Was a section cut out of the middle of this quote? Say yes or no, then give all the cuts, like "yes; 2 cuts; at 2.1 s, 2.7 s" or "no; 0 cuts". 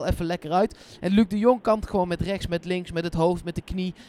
no; 0 cuts